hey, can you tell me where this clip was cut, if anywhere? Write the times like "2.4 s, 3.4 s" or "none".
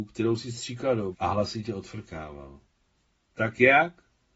1.1 s